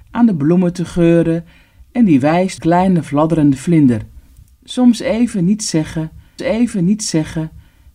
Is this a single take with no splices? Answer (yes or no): no